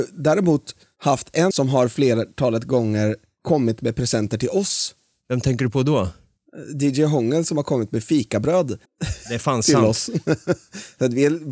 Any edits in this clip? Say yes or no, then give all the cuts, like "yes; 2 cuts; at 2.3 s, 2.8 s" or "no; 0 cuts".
yes; 2 cuts; at 1.5 s, 8.8 s